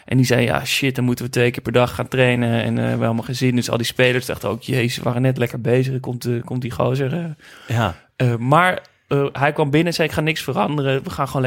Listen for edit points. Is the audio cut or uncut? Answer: uncut